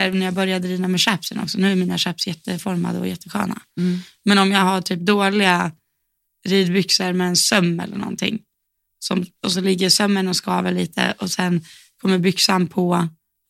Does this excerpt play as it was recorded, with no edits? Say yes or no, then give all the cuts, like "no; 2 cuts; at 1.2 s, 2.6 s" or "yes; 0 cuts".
yes; 0 cuts